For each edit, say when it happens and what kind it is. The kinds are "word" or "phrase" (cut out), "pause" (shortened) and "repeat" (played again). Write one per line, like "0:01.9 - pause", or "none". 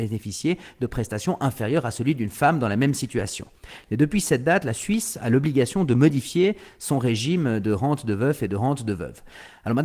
none